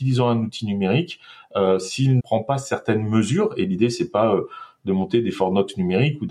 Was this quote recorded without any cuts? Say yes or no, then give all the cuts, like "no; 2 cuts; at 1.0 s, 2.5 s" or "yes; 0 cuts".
no; 1 cut; at 2.2 s